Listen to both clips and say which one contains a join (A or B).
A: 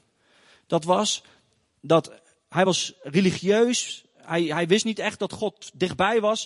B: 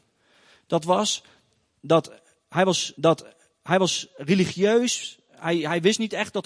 B